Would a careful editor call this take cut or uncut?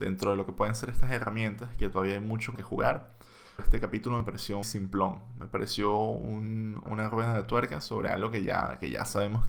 cut